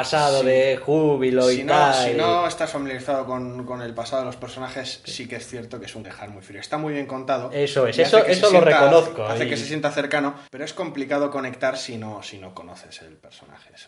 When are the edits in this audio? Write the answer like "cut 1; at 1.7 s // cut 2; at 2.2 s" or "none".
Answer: cut 1; at 6.0 s // cut 2; at 10.5 s